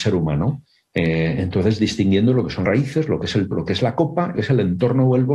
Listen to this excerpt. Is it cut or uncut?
cut